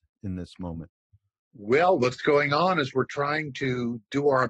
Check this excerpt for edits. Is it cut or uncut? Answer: uncut